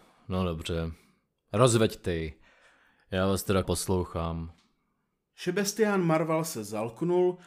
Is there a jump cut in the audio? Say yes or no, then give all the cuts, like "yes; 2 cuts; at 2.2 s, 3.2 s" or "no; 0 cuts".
yes; 1 cut; at 3.6 s